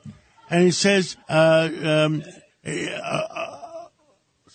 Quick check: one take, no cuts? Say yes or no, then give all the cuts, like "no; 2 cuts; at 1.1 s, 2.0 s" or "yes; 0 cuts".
no; 1 cut; at 1.2 s